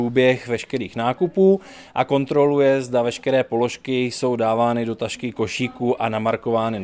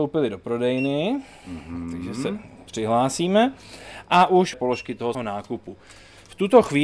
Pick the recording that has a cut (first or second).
second